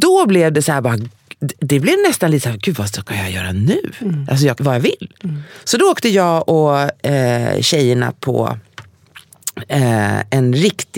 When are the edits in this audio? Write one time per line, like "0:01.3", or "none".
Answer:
0:04.6

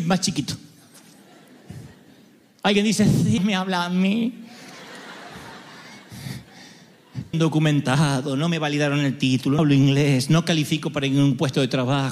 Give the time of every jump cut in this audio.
0:03.4
0:07.3
0:09.6

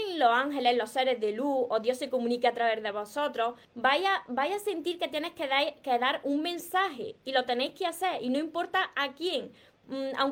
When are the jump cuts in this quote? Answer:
0:03.6

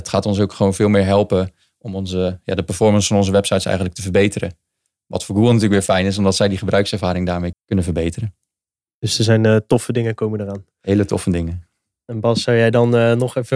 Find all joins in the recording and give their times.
0:07.5

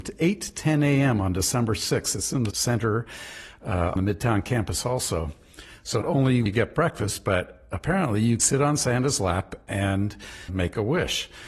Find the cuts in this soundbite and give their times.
0:02.5
0:04.0
0:06.0
0:06.5
0:08.4
0:10.5

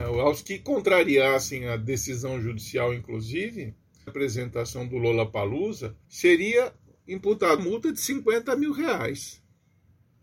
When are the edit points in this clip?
0:04.1
0:06.0
0:07.6

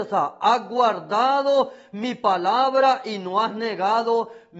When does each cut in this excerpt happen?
none

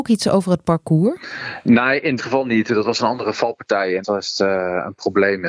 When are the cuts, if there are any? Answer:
0:02.2
0:04.0

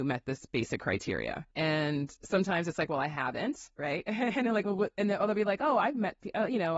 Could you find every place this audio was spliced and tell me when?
0:01.5

